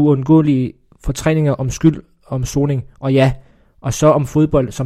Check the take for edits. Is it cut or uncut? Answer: uncut